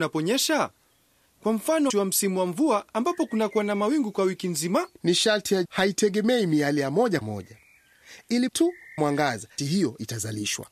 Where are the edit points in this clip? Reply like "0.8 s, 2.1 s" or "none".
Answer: 1.9 s, 4.9 s, 5.6 s, 7.2 s, 8.5 s, 9.0 s, 9.6 s